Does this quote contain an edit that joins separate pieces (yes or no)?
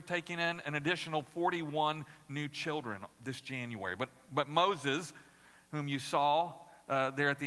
no